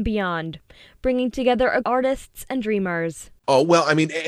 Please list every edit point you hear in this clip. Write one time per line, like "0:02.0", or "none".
0:01.8
0:03.4